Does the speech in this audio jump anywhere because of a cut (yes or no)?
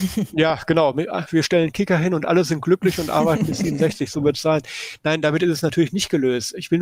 no